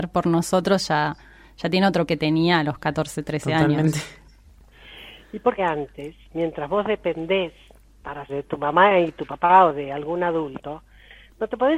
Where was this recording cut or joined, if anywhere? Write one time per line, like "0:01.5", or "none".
0:02.1
0:05.6
0:06.2
0:08.3

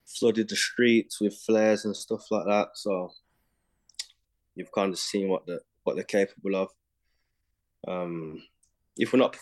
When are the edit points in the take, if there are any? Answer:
none

